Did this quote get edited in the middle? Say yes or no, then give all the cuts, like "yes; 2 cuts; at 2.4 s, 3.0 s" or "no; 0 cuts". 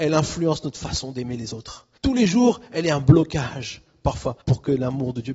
yes; 2 cuts; at 2.0 s, 4.4 s